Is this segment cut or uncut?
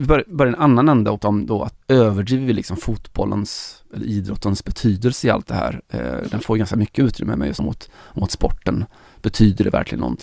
cut